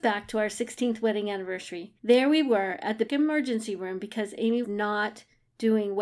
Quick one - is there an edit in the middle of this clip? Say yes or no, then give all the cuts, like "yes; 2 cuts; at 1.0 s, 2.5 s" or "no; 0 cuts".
yes; 3 cuts; at 2.0 s, 3.1 s, 4.6 s